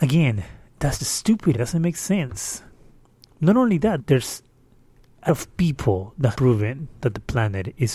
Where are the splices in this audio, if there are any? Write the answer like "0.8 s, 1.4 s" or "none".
1.0 s, 1.5 s, 4.0 s, 5.3 s, 6.3 s

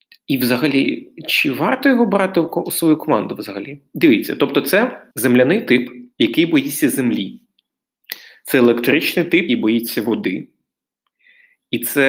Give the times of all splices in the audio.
5.1 s, 6.1 s, 9.5 s

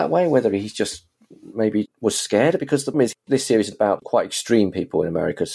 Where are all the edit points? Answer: 1.9 s, 2.6 s, 2.9 s, 3.7 s, 4.0 s

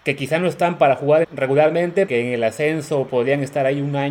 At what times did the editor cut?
1.2 s, 2.1 s, 3.1 s

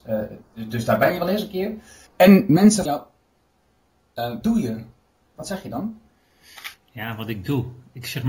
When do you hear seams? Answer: 2.1 s, 2.9 s, 4.4 s, 6.7 s

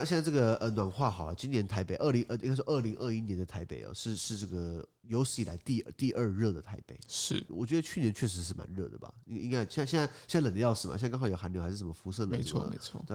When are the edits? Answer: 7.5 s

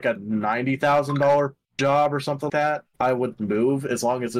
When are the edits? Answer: 1.6 s, 2.5 s, 2.9 s

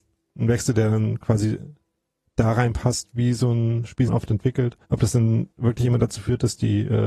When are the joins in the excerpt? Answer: 4.1 s, 4.8 s, 5.5 s

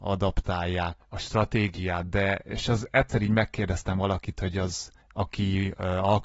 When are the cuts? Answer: 1.0 s, 5.0 s

